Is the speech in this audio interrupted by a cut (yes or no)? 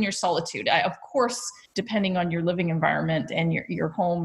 no